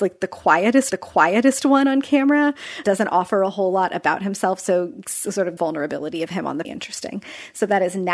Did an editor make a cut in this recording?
yes; 4 cuts; at 0.9 s, 2.8 s, 5.6 s, 6.6 s

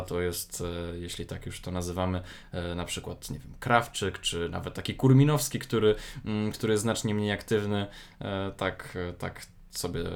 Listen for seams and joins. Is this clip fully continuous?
yes; 0 cuts

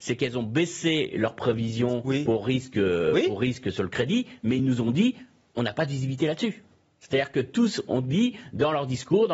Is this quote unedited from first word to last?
yes; 0 cuts

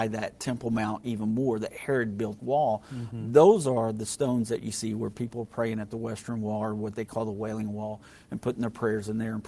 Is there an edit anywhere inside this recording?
yes; 1 cut; at 2.4 s

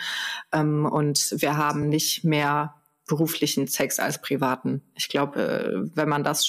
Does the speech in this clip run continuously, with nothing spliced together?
yes; 0 cuts

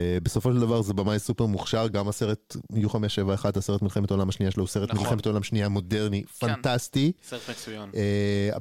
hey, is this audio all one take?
yes; 0 cuts

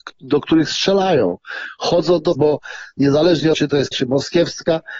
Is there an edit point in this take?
yes; 3 cuts; at 2.4 s, 3.5 s, 3.9 s

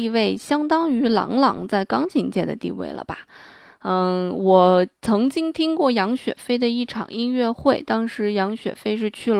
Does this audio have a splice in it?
no; 0 cuts

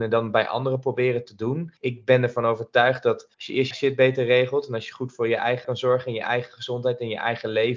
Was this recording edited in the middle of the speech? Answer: yes; 4 cuts; at 1.8 s, 3.3 s, 3.7 s, 5.6 s

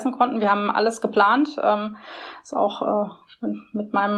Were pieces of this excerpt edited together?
no; 0 cuts

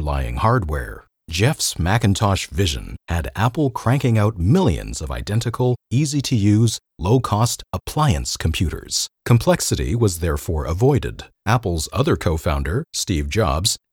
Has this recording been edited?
yes; 3 cuts; at 1.1 s, 9.2 s, 11.3 s

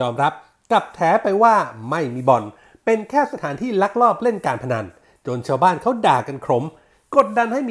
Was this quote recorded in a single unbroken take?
yes; 0 cuts

